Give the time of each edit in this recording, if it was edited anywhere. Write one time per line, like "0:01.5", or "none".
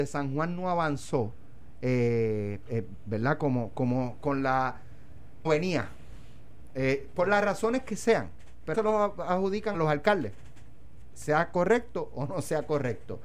0:05.4
0:08.7
0:09.7